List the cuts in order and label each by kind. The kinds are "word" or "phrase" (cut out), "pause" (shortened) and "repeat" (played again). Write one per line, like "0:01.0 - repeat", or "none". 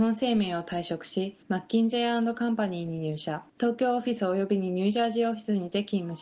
0:01.4 - pause
0:03.5 - pause